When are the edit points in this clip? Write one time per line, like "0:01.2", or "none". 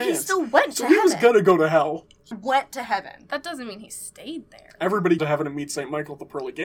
0:02.3
0:05.2

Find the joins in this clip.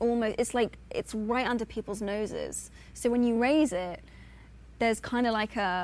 none

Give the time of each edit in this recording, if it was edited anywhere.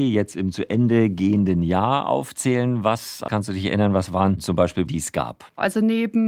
0:03.3
0:04.9

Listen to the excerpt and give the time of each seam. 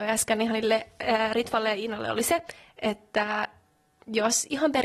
none

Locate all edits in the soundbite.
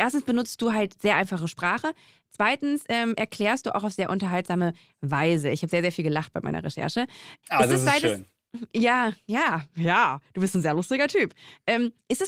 none

